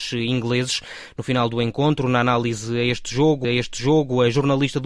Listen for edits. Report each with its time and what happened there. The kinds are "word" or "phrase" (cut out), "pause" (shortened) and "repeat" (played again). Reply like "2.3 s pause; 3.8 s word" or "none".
3.4 s repeat